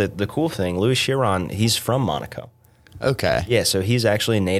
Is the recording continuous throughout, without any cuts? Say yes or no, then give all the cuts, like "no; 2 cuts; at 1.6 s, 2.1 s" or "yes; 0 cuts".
yes; 0 cuts